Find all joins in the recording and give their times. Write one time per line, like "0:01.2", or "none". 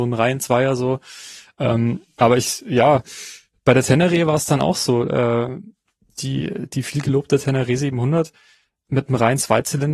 none